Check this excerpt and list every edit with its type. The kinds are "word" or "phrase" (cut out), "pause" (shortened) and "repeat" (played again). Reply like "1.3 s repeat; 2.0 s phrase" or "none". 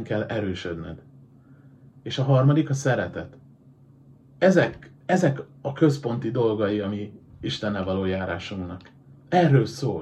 5.0 s pause

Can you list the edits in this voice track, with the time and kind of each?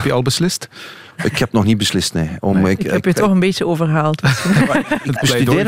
1.1 s pause

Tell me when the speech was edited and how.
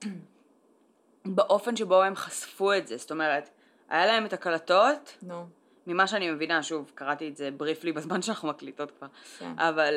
none

